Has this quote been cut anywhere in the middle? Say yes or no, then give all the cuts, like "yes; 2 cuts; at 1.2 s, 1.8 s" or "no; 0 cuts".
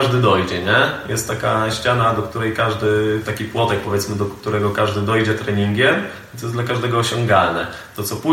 no; 0 cuts